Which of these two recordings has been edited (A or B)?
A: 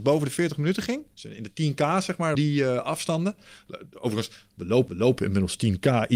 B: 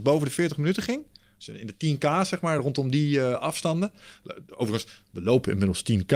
A